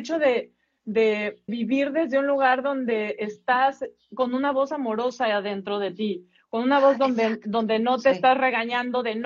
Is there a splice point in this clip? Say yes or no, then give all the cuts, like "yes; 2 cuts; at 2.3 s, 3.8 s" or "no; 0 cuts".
yes; 2 cuts; at 1.5 s, 3.2 s